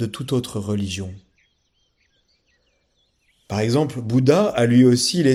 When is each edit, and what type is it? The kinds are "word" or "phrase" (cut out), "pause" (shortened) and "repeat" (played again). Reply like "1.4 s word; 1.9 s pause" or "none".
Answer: none